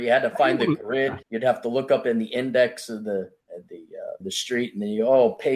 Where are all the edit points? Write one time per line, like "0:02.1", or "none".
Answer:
0:01.2
0:03.4
0:04.2